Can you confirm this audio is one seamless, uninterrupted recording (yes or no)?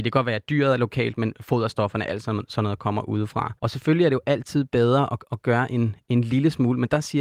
no